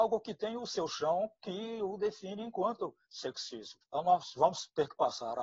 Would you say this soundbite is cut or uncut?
uncut